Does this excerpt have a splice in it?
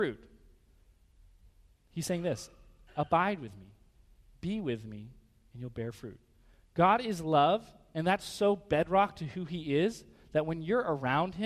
no; 0 cuts

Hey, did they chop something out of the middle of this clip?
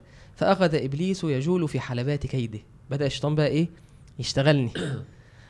no; 0 cuts

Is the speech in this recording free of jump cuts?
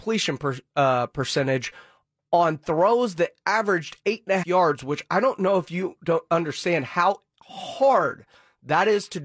no; 1 cut; at 4.4 s

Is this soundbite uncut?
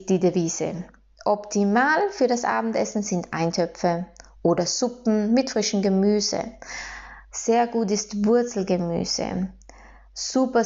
yes; 0 cuts

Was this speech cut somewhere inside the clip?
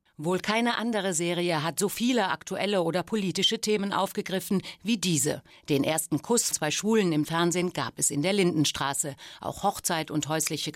yes; 2 cuts; at 6.5 s, 7.2 s

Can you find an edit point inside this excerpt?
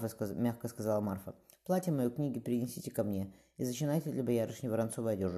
no; 0 cuts

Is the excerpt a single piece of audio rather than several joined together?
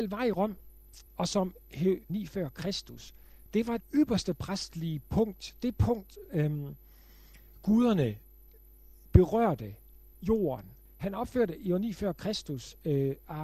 no; 5 cuts; at 1.1 s, 2.1 s, 3.8 s, 6.2 s, 10.8 s

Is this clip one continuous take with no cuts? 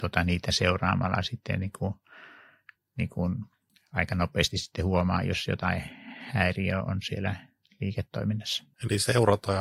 yes; 0 cuts

